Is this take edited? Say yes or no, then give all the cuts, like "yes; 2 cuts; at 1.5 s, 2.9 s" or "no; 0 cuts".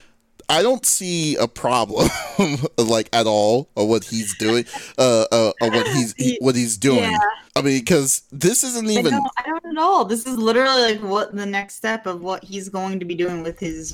yes; 1 cut; at 7.5 s